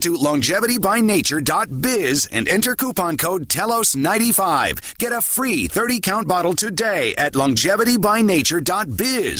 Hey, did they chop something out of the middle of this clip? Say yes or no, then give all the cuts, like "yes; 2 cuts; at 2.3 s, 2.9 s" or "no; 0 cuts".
no; 0 cuts